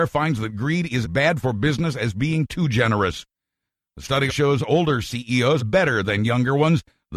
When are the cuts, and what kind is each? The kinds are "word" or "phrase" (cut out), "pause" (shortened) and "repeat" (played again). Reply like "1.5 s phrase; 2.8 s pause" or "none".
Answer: 1.0 s word; 4.3 s word; 5.6 s word